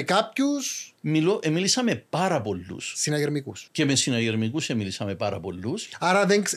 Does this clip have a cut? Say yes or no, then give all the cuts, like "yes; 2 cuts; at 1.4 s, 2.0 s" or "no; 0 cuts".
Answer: yes; 1 cut; at 3.7 s